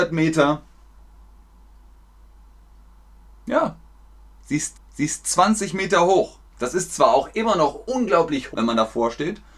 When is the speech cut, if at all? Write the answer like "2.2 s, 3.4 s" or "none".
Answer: 4.7 s, 6.5 s, 8.5 s